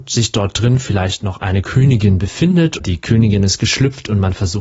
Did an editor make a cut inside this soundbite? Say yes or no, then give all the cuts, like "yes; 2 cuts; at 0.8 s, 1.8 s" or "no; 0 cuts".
yes; 1 cut; at 2.8 s